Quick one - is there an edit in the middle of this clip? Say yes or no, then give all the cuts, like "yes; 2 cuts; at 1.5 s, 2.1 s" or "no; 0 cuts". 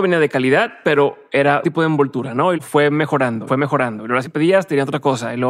yes; 4 cuts; at 1.6 s, 2.5 s, 3.5 s, 4.2 s